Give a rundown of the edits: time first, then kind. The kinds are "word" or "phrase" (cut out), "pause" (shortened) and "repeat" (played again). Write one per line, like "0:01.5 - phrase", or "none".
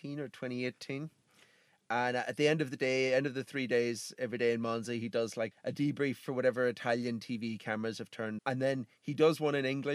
0:05.5 - word
0:08.4 - word